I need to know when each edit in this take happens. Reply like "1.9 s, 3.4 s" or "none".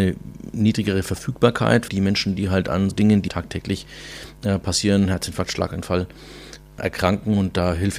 1.9 s, 2.9 s, 3.3 s